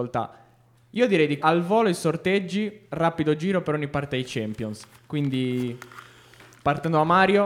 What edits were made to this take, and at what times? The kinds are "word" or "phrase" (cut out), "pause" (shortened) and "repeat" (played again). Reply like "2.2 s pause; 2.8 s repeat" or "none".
1.4 s word